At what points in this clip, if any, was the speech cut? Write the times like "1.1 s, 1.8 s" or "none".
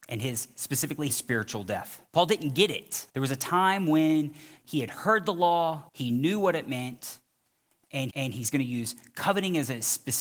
1.1 s, 2.1 s, 3.1 s, 4.6 s, 5.9 s, 8.1 s